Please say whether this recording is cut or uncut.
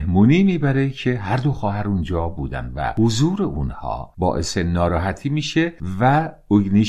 uncut